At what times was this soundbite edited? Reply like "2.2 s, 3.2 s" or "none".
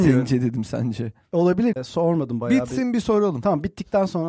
1.7 s